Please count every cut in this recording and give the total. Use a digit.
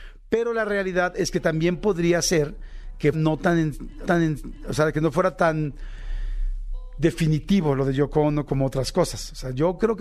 2